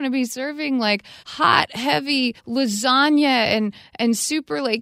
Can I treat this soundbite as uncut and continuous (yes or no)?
no